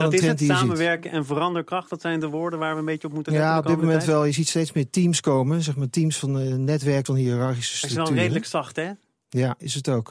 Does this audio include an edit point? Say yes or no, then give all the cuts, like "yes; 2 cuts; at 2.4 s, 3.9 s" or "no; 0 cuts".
yes; 1 cut; at 7.1 s